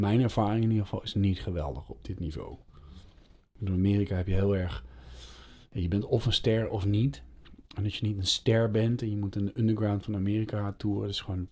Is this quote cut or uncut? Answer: uncut